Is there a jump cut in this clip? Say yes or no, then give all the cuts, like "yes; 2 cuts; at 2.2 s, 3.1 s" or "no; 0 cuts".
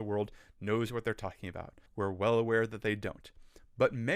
yes; 1 cut; at 1.9 s